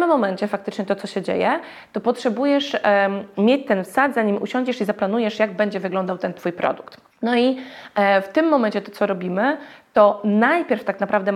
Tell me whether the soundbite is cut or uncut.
cut